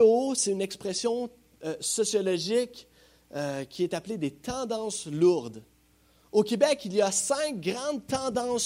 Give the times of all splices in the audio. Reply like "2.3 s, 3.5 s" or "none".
none